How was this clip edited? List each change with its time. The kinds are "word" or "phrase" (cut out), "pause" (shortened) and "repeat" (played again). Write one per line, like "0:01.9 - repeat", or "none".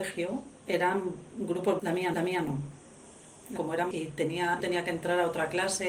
0:01.8 - word
0:02.1 - repeat
0:03.6 - word
0:03.9 - word
0:04.6 - phrase